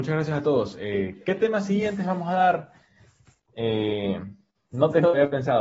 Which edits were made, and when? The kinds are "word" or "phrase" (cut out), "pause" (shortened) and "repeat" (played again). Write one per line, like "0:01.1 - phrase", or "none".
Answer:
none